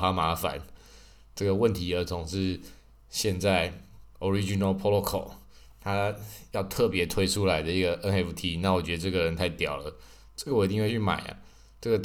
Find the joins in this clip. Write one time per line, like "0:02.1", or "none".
none